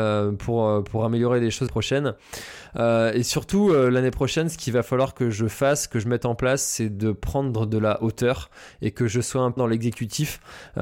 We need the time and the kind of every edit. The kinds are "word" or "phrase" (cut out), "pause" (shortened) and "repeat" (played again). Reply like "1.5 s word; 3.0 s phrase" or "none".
1.7 s word; 9.6 s word